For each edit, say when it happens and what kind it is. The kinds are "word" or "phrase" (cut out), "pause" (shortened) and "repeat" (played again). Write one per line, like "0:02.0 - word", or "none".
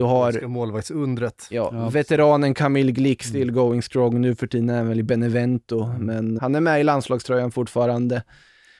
0:06.4 - word